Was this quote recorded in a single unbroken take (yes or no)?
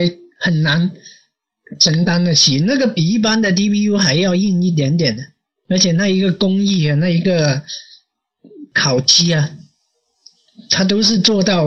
yes